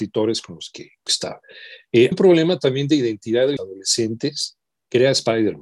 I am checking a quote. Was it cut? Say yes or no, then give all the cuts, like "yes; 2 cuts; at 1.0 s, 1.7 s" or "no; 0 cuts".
yes; 3 cuts; at 1.1 s, 2.1 s, 3.6 s